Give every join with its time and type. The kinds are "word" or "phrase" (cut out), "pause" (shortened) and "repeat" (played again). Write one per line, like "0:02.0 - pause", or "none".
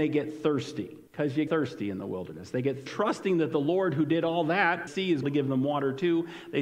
0:01.1 - pause
0:01.5 - word
0:02.9 - phrase
0:04.9 - phrase
0:05.2 - phrase